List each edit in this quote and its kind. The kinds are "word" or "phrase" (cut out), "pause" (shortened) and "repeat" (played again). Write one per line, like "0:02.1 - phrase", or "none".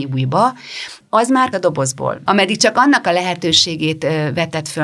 0:01.5 - word